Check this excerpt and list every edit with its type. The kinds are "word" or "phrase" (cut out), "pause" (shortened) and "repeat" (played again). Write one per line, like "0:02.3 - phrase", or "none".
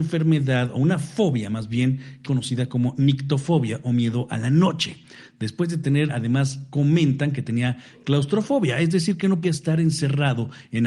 0:02.2 - word
0:06.1 - word
0:09.4 - word